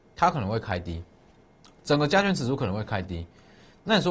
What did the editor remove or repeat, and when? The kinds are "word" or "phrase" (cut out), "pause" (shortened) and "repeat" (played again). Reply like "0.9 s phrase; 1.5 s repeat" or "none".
none